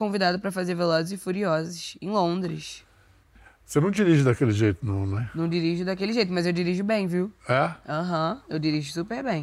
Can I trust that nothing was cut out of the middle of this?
yes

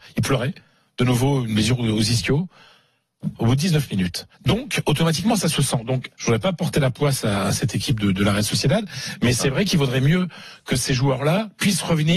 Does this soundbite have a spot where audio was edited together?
yes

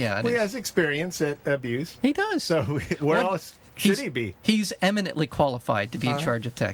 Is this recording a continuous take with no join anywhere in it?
yes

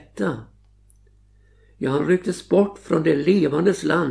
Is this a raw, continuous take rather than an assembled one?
yes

